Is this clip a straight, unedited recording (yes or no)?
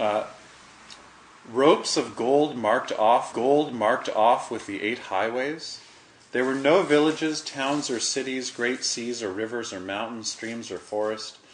no